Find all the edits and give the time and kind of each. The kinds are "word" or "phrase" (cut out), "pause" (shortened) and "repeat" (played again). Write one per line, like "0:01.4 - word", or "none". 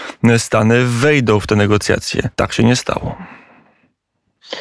0:02.3 - pause